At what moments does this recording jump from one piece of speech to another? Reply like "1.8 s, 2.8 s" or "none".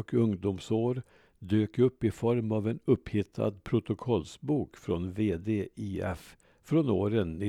none